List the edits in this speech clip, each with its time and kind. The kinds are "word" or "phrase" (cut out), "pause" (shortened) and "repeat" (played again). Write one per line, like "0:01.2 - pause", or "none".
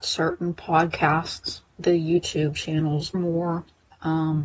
0:01.7 - word
0:03.1 - word